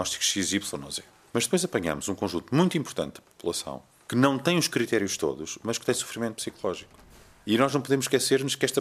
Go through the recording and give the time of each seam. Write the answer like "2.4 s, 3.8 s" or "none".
none